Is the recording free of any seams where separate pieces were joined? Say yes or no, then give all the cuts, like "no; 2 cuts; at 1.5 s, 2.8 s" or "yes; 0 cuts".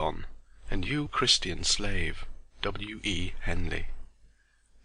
no; 2 cuts; at 1.0 s, 2.5 s